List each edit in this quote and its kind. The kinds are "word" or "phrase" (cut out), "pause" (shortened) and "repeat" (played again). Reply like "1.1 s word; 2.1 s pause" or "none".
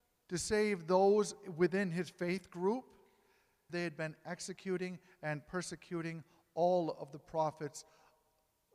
3.7 s word